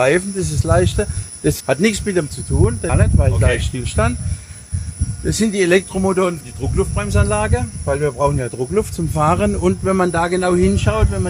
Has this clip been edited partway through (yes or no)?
yes